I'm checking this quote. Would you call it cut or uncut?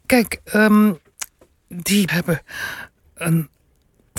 cut